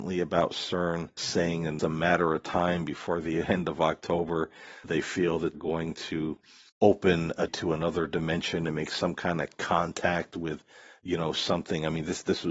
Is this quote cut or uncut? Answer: cut